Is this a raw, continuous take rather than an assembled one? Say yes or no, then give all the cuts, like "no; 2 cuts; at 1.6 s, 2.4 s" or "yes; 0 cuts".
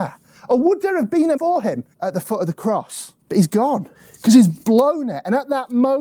no; 4 cuts; at 1.4 s, 1.9 s, 3.2 s, 3.9 s